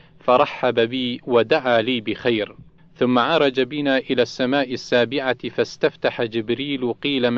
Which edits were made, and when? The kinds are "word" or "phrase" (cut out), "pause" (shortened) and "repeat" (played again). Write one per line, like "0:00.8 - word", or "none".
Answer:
0:02.8 - pause